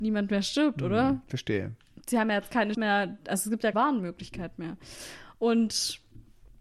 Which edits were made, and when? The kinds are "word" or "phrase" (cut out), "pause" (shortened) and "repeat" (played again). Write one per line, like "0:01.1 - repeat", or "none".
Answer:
0:02.7 - word
0:03.7 - word